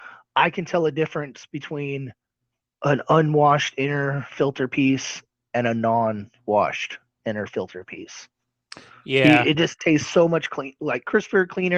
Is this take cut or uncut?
uncut